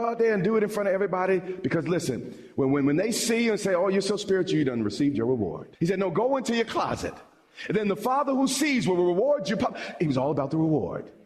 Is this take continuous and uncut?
no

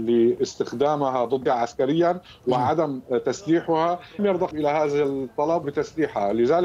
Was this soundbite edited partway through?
yes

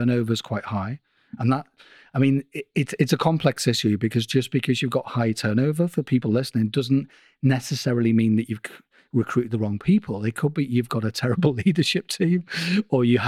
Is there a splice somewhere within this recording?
no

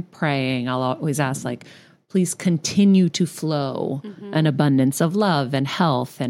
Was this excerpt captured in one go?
yes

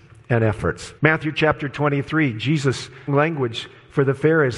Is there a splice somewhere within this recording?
yes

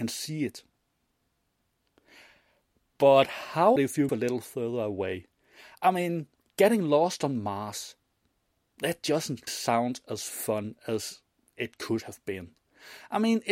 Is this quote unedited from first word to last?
no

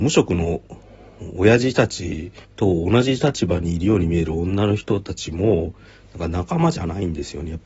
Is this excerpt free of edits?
no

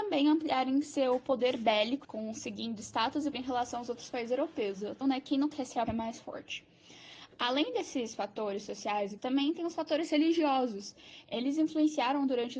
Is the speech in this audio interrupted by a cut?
yes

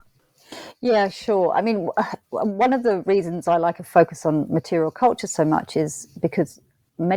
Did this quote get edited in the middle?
yes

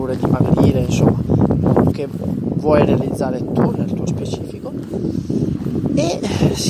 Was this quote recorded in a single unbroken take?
no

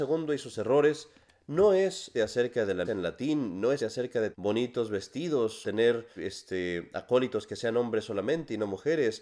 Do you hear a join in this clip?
yes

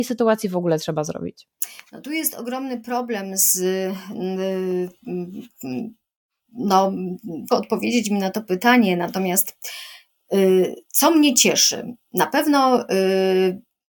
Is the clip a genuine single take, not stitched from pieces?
no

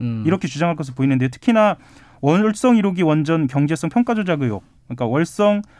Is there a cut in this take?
no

